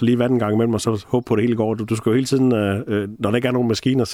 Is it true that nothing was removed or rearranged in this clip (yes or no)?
yes